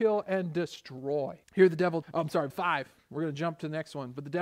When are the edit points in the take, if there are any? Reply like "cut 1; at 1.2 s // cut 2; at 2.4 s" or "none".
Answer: cut 1; at 1.4 s // cut 2; at 2.0 s // cut 3; at 2.5 s